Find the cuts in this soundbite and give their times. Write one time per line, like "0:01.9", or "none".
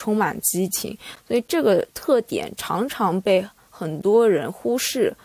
0:01.9

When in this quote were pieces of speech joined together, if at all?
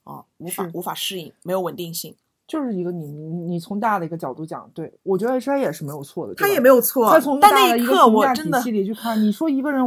none

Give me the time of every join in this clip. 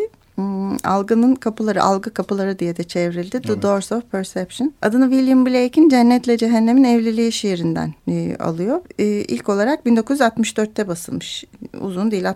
0:04.8
0:08.0
0:08.8

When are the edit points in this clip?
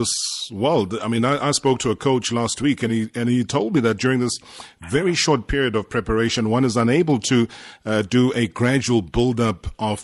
none

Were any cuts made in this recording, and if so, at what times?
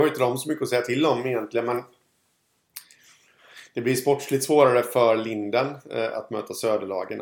none

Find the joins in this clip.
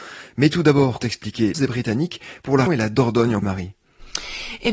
0:01.0
0:01.5
0:02.7
0:03.4

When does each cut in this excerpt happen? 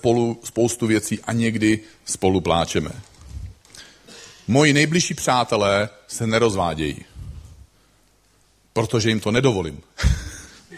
none

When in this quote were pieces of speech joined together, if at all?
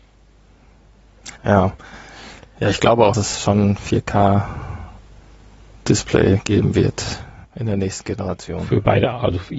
0:01.4
0:03.1
0:07.4

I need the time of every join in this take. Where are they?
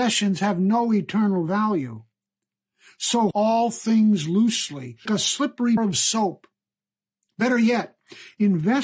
0:03.3
0:05.1
0:05.8

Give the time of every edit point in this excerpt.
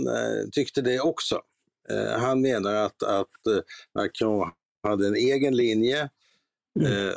none

